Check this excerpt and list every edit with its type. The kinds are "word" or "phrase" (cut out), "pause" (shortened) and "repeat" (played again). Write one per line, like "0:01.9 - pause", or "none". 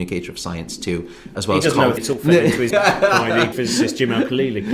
0:01.3 - word
0:02.0 - word
0:02.7 - word
0:03.5 - word